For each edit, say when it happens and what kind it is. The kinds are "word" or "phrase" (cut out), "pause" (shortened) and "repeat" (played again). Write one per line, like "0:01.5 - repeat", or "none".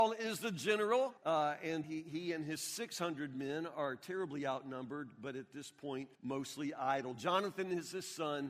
0:01.2 - pause
0:01.8 - word
0:06.2 - pause